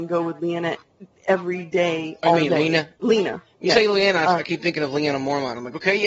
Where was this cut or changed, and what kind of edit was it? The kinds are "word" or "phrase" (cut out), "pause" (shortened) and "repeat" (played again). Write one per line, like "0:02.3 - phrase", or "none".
0:02.9 - pause